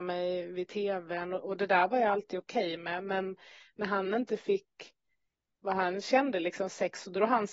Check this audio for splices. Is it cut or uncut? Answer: uncut